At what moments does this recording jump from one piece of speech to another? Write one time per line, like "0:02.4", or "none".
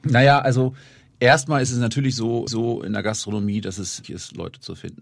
0:02.5
0:04.0

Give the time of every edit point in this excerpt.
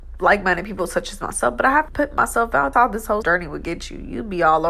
0:01.9
0:02.7
0:03.2

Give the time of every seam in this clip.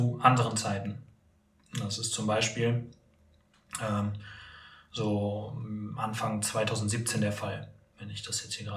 none

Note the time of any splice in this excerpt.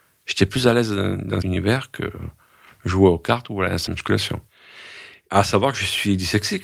0:01.4
0:03.9

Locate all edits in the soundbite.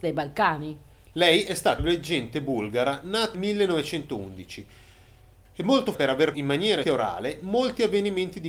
0:01.8
0:03.3
0:05.9
0:06.3
0:06.8

